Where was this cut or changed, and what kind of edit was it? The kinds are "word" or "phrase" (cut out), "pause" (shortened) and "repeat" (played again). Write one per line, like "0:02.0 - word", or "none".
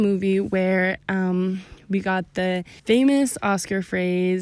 0:02.8 - pause